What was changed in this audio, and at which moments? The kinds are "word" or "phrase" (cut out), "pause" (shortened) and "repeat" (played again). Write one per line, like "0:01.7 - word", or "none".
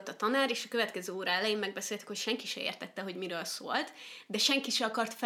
none